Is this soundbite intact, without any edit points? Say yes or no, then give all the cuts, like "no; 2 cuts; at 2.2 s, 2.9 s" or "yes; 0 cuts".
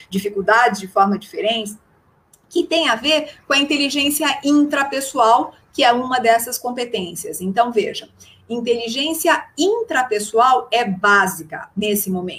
yes; 0 cuts